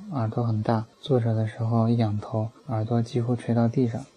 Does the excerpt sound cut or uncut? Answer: cut